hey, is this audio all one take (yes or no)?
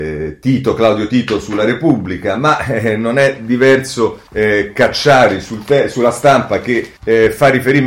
no